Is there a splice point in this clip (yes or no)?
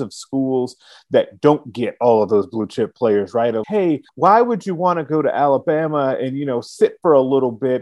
yes